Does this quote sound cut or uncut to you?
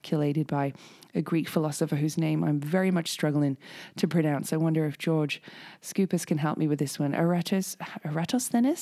uncut